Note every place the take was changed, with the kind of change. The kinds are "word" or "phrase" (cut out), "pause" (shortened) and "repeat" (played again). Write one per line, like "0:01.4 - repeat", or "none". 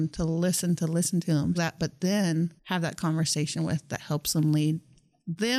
0:01.5 - phrase
0:02.6 - pause